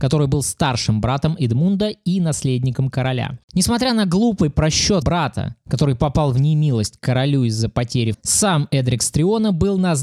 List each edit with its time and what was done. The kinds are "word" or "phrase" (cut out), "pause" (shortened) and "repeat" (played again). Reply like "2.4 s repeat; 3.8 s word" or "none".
3.4 s pause; 5.0 s word; 8.1 s word